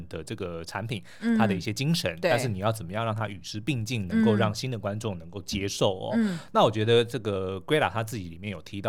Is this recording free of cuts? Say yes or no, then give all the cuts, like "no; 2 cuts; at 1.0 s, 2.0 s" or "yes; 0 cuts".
yes; 0 cuts